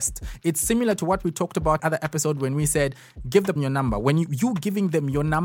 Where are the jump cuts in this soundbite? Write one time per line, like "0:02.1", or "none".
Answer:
0:01.8
0:03.6